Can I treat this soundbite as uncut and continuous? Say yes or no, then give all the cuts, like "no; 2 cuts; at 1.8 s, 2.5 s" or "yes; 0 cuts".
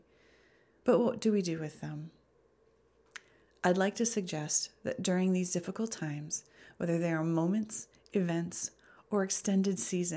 yes; 0 cuts